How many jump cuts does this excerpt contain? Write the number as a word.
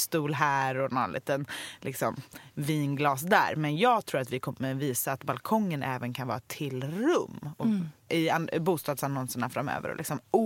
zero